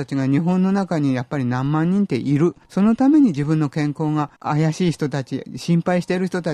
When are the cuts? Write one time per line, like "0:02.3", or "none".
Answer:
0:02.6
0:04.4